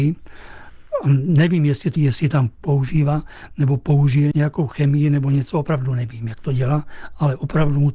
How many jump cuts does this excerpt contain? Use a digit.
2